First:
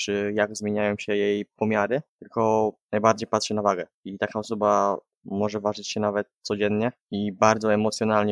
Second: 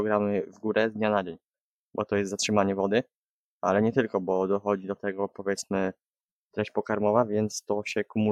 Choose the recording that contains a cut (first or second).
first